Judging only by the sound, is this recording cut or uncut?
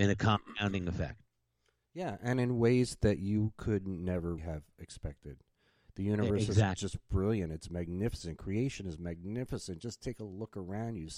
cut